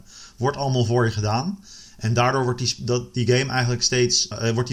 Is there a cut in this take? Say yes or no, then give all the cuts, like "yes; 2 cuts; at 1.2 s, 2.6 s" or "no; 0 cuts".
no; 0 cuts